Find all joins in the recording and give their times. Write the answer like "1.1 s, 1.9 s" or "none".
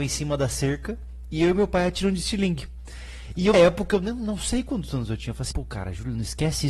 3.5 s, 5.5 s